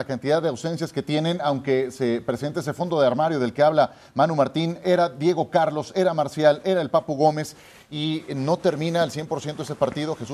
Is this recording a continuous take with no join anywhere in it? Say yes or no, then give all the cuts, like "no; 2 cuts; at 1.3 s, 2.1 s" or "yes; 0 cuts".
yes; 0 cuts